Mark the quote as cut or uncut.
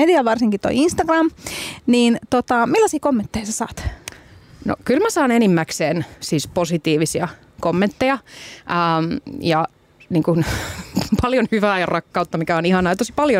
uncut